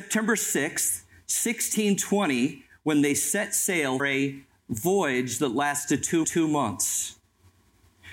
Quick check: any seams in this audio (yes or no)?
yes